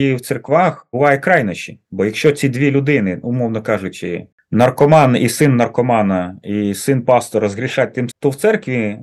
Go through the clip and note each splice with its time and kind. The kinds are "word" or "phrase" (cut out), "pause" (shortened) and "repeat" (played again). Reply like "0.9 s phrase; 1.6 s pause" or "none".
1.8 s pause; 4.3 s pause; 8.1 s phrase

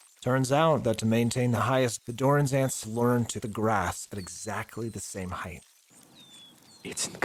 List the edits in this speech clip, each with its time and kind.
2.0 s word; 2.8 s word; 3.4 s word

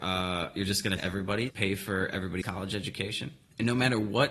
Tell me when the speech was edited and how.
1.0 s word; 1.5 s word; 2.4 s word

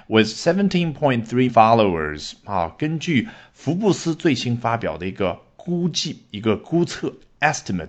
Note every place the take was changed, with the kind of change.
1.5 s word

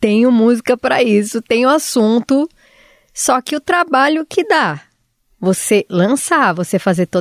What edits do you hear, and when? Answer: none

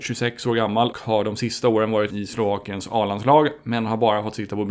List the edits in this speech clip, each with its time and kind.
0.9 s word; 2.1 s word

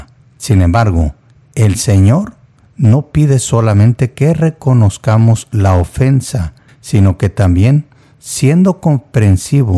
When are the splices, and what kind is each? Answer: none

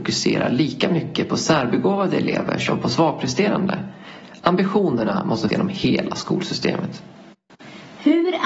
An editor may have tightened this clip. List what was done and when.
5.5 s word

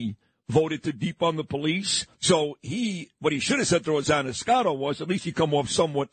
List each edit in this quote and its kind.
2.1 s pause

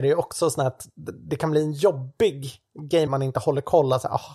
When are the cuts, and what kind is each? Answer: 3.1 s phrase

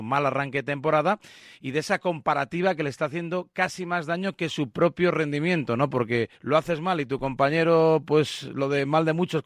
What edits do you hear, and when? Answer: 6.3 s pause

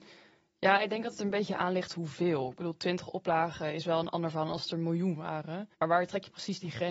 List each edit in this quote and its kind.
5.7 s pause

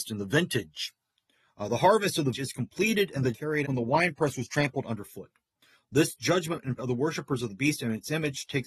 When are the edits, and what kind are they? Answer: 2.3 s word; 3.3 s word; 3.6 s word; 6.8 s word

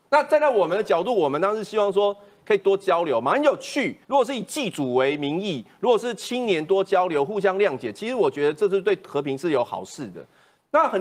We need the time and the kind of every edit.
4.0 s pause

